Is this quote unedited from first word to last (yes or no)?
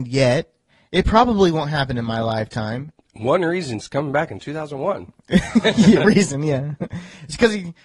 no